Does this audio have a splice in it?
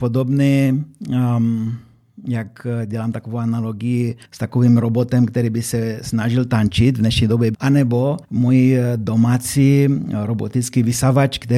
yes; 3 cuts; at 4.2 s, 7.5 s, 8.2 s

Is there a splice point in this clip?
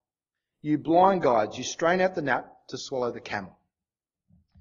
no; 0 cuts

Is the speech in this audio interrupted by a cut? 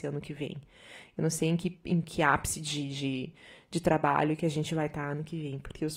no; 0 cuts

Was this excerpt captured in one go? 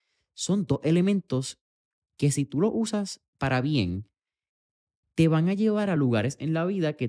yes; 0 cuts

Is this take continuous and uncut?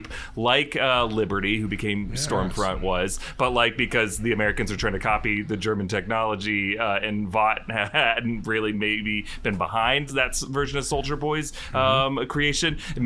no; 1 cut; at 10.1 s

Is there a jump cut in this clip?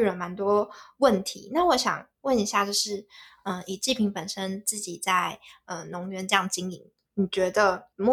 no; 0 cuts

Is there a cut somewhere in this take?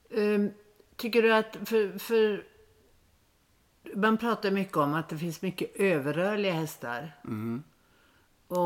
no; 0 cuts

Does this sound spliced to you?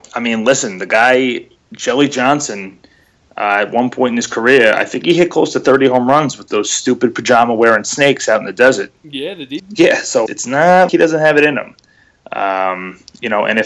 yes; 4 cuts; at 6.5 s, 9.6 s, 10.3 s, 10.9 s

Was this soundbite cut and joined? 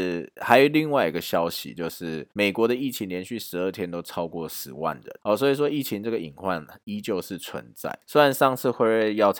yes; 3 cuts; at 2.3 s, 5.2 s, 8.0 s

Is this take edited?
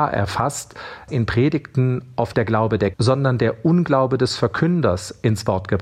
yes; 3 cuts; at 1.1 s, 2.3 s, 2.9 s

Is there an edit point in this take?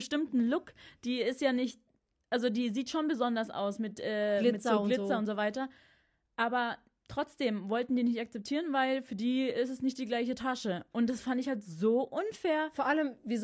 no; 0 cuts

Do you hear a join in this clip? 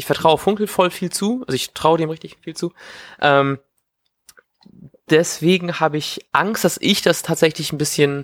no; 0 cuts

